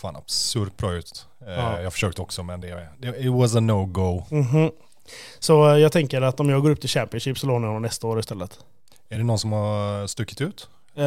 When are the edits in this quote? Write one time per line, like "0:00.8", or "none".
none